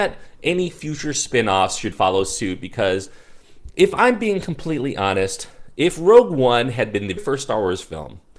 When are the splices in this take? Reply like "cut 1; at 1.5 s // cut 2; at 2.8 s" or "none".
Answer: cut 1; at 1.9 s // cut 2; at 7.2 s